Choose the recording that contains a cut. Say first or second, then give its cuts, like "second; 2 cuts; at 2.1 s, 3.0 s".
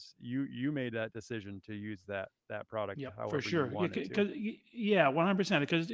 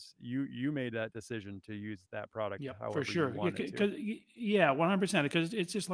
second; 1 cut; at 2.0 s